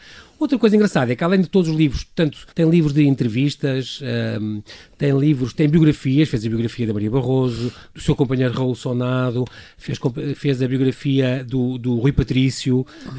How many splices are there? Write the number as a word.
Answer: one